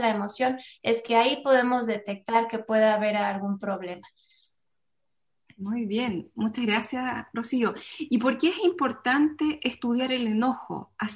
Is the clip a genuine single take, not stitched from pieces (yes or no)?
yes